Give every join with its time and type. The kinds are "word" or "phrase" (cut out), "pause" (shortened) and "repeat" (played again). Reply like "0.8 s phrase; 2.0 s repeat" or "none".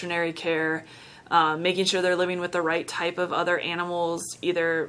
none